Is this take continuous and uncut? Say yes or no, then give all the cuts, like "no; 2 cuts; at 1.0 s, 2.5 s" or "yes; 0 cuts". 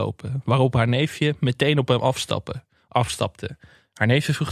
yes; 0 cuts